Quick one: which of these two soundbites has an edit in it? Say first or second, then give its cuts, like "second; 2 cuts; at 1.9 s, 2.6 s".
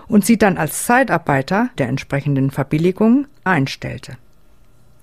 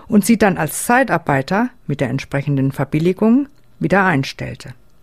first; 2 cuts; at 1.8 s, 3.5 s